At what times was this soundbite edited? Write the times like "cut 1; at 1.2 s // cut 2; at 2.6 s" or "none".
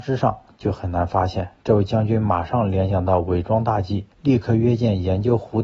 cut 1; at 1.6 s // cut 2; at 4.1 s